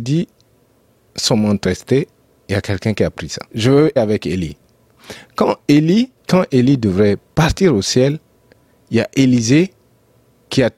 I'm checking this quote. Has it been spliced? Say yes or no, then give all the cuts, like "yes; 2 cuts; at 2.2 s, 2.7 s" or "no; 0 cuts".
yes; 4 cuts; at 1.6 s, 3.5 s, 4.0 s, 6.2 s